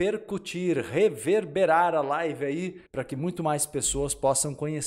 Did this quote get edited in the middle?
yes; 1 cut; at 2.9 s

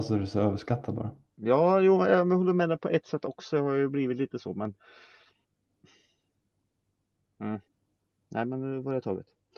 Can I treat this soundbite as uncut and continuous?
yes; 0 cuts

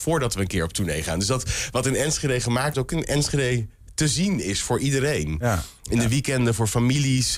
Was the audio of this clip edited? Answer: yes; 1 cut; at 2.7 s

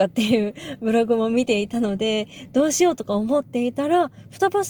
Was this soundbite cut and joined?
no; 0 cuts

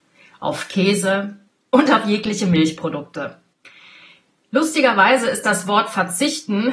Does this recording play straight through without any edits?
yes; 0 cuts

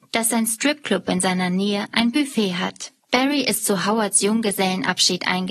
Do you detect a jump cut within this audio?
yes; 1 cut; at 3.0 s

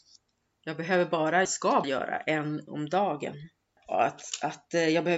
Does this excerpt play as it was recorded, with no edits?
no; 4 cuts; at 1.4 s, 1.8 s, 2.7 s, 3.7 s

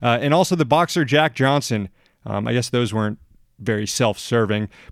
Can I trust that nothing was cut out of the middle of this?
yes; 0 cuts

